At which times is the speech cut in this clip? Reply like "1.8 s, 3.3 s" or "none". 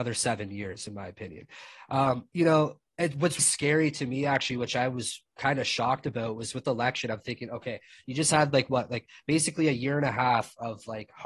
2.3 s, 2.9 s, 3.4 s, 6.6 s